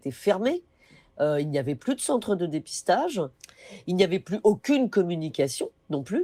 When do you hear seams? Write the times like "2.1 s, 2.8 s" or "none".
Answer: none